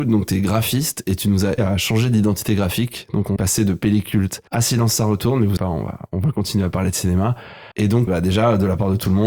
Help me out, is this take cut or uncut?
cut